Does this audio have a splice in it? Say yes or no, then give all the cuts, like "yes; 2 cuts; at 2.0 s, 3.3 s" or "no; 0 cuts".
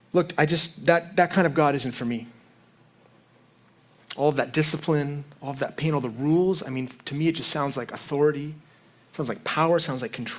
no; 0 cuts